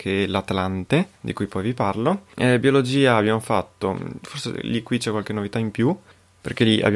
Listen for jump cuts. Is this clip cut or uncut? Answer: cut